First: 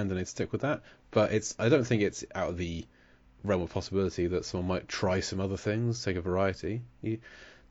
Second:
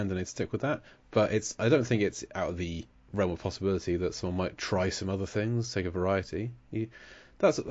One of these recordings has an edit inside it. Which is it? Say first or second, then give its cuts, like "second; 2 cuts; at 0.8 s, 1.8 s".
second; 1 cut; at 2.9 s